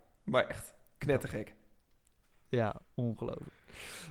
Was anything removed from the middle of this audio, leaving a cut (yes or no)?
no